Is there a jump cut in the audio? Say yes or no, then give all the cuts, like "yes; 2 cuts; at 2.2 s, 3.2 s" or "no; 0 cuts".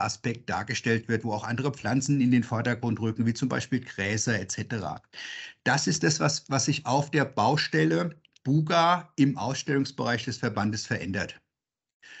no; 0 cuts